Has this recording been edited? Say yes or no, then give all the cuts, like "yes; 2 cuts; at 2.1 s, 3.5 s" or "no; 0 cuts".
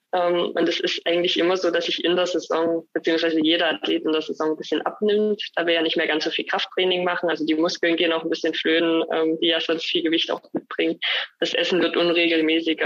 no; 0 cuts